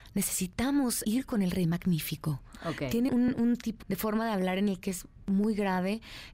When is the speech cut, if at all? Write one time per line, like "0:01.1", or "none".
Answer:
0:01.0
0:03.1
0:03.8